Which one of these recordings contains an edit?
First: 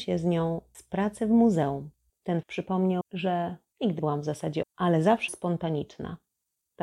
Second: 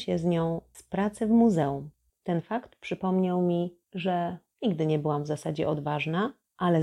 first; 5 cuts; at 2.4 s, 3.0 s, 4.0 s, 4.6 s, 5.3 s

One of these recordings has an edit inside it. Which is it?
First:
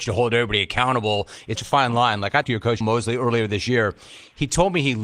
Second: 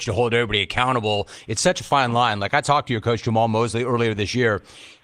first; 3 cuts; at 1.6 s, 2.4 s, 2.8 s

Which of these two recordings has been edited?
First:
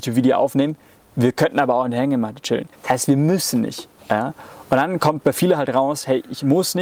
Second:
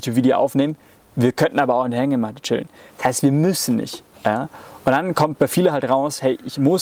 first; 1 cut; at 2.7 s

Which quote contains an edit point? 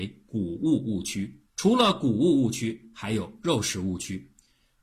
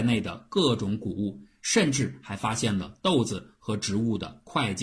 first; 1 cut; at 1.5 s

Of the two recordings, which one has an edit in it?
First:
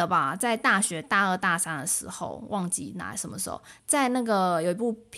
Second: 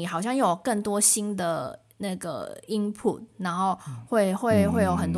first; 1 cut; at 3.8 s

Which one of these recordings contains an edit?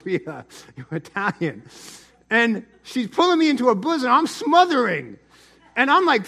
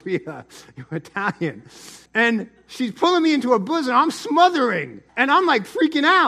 second; 2 cuts; at 2.1 s, 5.1 s

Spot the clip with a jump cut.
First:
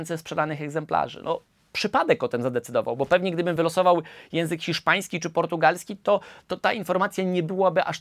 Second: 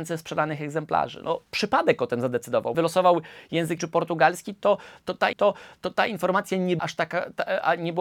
second; 5 cuts; at 1.5 s, 2.7 s, 3.8 s, 5.3 s, 6.8 s

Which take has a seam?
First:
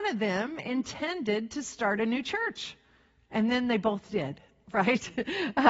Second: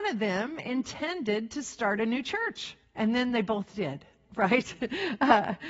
second; 1 cut; at 2.8 s

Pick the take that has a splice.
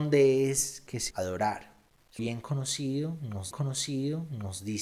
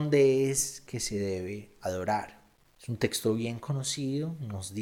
first; 3 cuts; at 1.1 s, 2.2 s, 3.5 s

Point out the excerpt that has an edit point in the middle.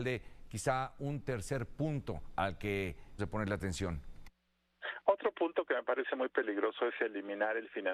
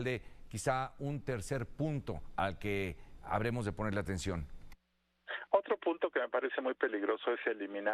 first; 1 cut; at 3.2 s

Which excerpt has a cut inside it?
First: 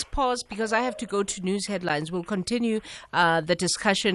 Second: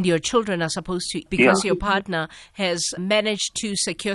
second; 2 cuts; at 1.3 s, 3.0 s

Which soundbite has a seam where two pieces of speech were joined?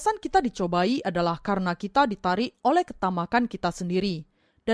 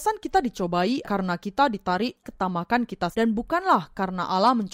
second; 3 cuts; at 1.0 s, 2.2 s, 3.1 s

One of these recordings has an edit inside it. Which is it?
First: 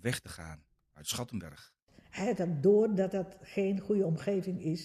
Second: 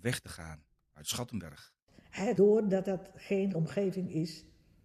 second; 2 cuts; at 2.4 s, 3.5 s

